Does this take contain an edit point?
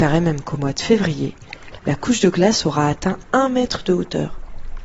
no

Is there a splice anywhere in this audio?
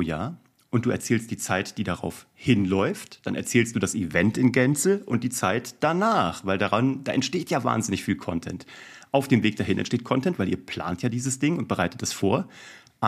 no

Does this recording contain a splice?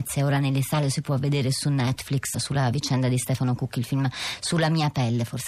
yes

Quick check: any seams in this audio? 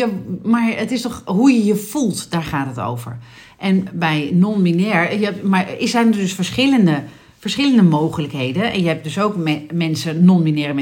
no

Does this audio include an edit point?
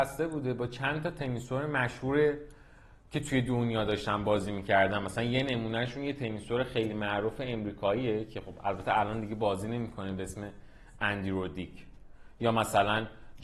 no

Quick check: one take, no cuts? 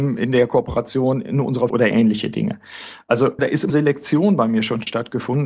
no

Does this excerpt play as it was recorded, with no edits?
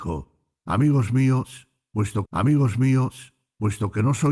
no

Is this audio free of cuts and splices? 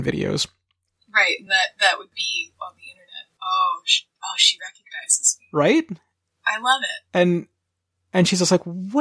yes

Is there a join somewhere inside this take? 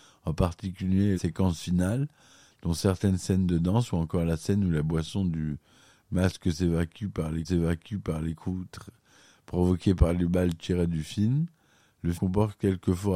yes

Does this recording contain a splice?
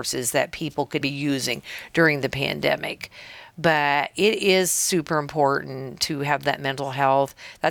yes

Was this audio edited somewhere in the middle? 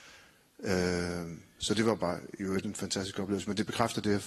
no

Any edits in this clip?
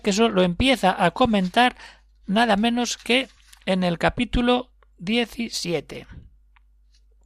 no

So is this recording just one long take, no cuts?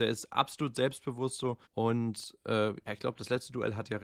no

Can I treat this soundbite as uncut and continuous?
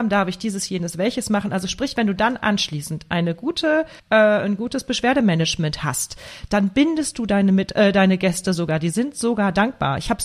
no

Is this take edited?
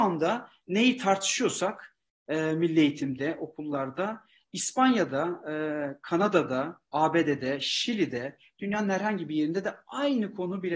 no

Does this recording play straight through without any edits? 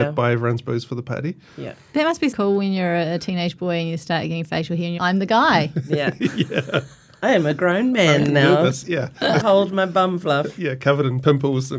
no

